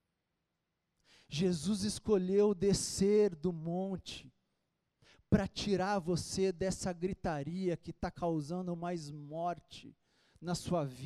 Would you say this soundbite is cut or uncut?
uncut